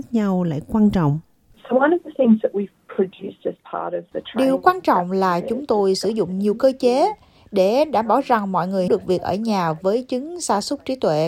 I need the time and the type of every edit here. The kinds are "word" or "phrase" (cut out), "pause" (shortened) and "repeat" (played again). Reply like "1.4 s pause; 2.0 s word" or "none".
8.9 s word